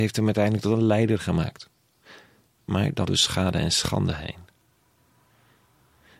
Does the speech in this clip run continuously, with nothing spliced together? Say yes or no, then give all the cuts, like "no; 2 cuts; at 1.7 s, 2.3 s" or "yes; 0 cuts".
no; 1 cut; at 3.1 s